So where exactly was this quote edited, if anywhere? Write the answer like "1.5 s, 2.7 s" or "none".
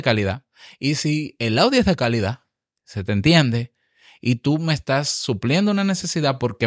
none

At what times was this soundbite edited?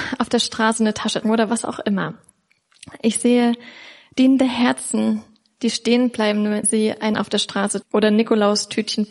1.2 s, 6.6 s, 7.1 s, 7.8 s

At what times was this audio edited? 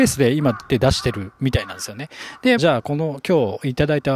2.6 s

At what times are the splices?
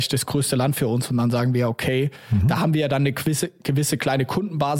none

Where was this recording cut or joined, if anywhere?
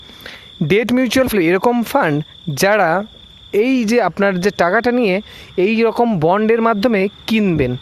1.3 s

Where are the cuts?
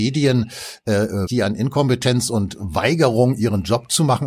1.3 s

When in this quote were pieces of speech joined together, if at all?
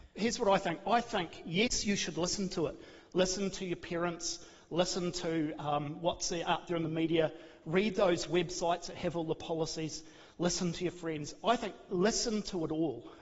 none

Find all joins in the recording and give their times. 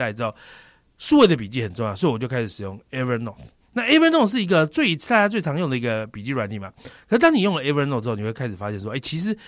none

